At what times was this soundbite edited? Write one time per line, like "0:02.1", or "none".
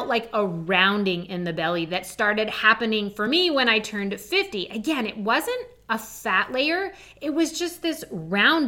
none